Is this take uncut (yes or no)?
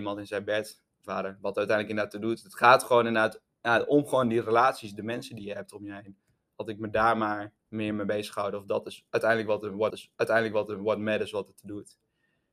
no